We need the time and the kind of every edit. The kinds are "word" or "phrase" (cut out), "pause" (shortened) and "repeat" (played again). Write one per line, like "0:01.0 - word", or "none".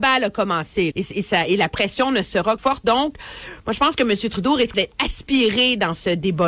0:00.9 - word
0:02.6 - phrase
0:04.7 - word